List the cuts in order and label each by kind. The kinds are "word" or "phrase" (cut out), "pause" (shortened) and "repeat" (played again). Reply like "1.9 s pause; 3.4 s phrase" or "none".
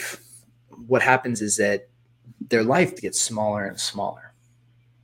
1.4 s word; 3.0 s word; 3.7 s phrase

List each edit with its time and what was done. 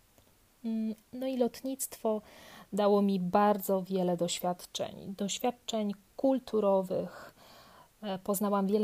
1.0 s pause

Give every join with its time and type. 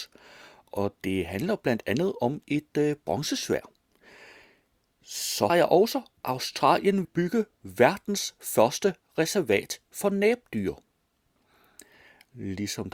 5.5 s word; 7.0 s word

